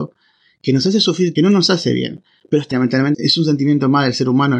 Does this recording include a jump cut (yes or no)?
yes